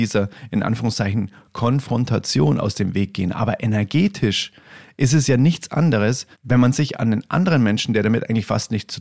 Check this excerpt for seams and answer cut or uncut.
cut